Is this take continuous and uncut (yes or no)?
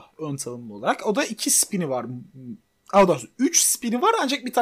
yes